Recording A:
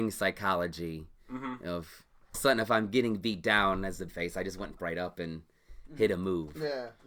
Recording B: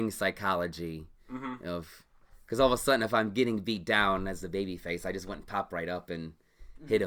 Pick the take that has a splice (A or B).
A